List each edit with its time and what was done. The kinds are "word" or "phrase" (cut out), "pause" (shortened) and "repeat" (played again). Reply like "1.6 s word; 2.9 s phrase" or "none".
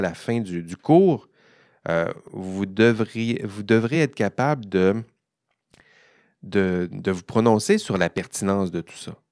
none